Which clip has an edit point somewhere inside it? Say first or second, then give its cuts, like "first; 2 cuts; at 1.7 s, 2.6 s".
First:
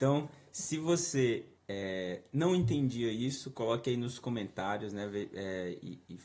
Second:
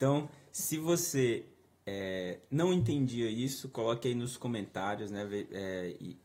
first; 1 cut; at 1.6 s